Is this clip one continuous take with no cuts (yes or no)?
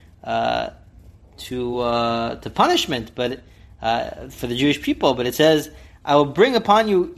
yes